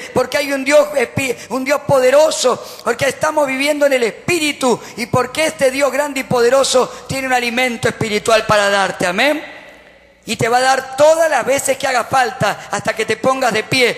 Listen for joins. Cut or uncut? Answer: uncut